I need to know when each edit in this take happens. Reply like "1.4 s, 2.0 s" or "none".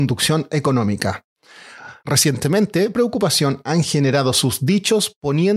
2.9 s